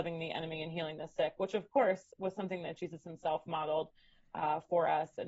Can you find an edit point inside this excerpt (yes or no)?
no